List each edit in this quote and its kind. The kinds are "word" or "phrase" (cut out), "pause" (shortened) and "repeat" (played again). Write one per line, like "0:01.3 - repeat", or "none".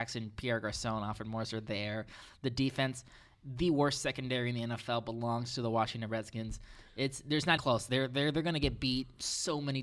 0:07.6 - word